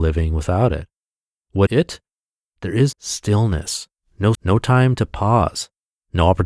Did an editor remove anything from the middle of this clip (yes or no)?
yes